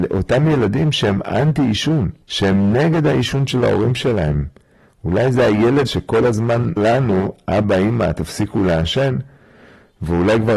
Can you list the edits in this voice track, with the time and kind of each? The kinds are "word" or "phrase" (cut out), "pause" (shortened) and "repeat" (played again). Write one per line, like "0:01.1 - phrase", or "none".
0:02.2 - pause
0:05.9 - word
0:06.8 - word